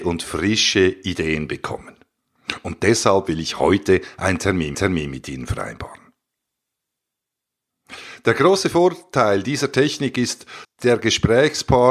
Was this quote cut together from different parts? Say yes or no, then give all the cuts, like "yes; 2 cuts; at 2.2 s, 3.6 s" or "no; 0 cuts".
yes; 2 cuts; at 4.7 s, 10.6 s